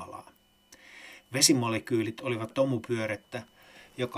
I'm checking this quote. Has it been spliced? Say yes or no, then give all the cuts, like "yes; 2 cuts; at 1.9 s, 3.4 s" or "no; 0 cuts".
yes; 1 cut; at 2.5 s